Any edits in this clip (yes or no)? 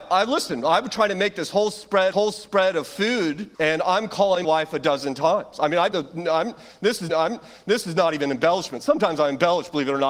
yes